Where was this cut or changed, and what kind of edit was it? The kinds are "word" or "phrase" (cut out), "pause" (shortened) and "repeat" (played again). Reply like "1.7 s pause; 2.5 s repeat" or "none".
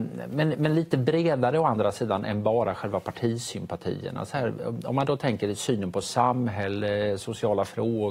none